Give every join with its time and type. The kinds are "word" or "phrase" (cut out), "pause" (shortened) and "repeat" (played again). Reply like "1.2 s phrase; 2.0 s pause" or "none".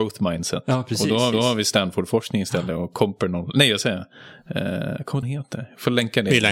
1.3 s repeat; 5.2 s phrase